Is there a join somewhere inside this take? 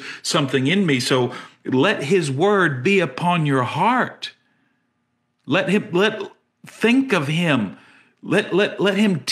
no; 0 cuts

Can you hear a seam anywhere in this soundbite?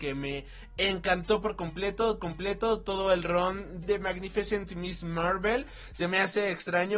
yes; 2 cuts; at 2.2 s, 3.8 s

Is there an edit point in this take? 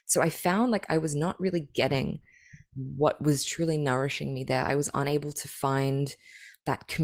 no; 0 cuts

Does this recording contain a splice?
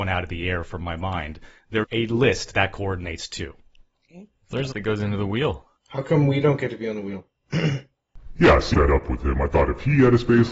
yes; 5 cuts; at 1.8 s, 2.5 s, 4.7 s, 5.8 s, 8.7 s

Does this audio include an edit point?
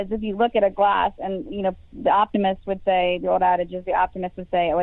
no; 0 cuts

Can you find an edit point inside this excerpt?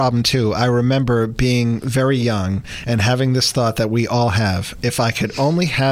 no; 0 cuts

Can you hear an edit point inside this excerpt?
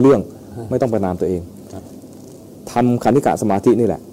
no; 0 cuts

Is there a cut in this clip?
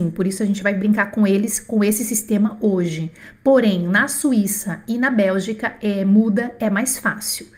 no; 0 cuts

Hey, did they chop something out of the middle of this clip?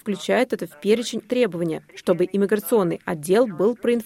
yes; 2 cuts; at 1.2 s, 1.9 s

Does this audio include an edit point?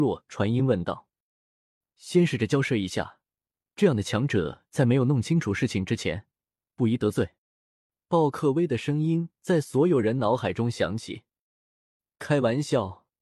yes; 1 cut; at 7.4 s

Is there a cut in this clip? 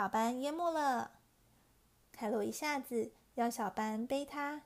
no; 0 cuts

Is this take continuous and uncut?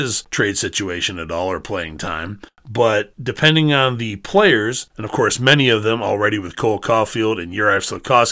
yes; 0 cuts

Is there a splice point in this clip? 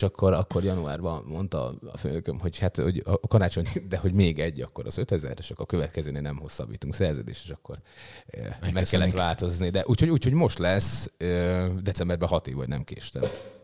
yes; 1 cut; at 3.7 s

